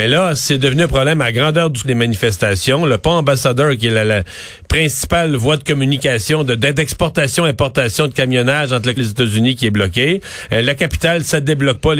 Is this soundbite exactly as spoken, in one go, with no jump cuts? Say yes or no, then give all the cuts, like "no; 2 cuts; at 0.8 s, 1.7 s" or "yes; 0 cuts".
no; 2 cuts; at 1.8 s, 9.0 s